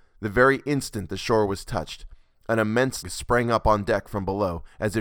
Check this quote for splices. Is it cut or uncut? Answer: cut